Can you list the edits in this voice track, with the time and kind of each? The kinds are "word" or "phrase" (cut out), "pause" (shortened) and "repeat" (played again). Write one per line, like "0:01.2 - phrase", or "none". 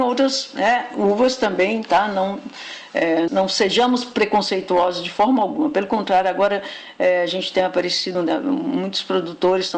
0:03.3 - word
0:08.1 - word